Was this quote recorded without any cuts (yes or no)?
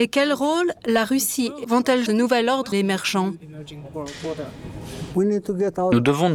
no